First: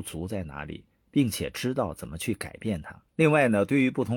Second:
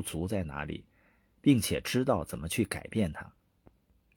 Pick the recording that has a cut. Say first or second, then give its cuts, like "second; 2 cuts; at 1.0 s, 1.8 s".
first; 2 cuts; at 0.9 s, 3.1 s